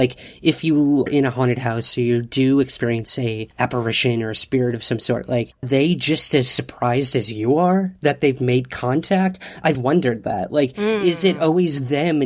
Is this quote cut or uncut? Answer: cut